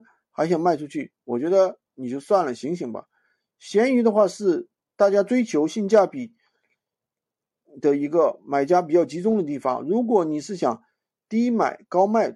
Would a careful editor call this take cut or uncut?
uncut